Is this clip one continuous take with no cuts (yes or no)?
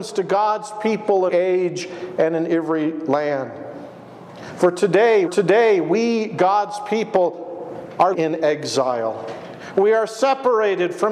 no